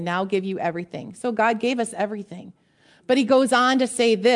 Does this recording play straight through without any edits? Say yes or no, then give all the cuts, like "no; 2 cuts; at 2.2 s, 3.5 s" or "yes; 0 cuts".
yes; 0 cuts